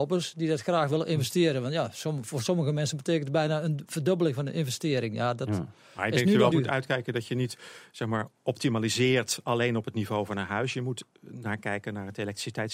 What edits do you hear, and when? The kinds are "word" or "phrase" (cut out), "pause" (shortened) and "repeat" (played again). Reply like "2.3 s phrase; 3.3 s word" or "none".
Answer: 6.5 s word